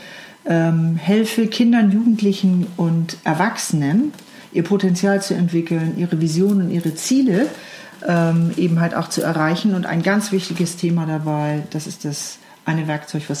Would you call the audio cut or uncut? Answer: uncut